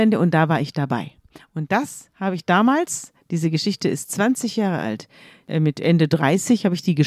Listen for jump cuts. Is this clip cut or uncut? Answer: uncut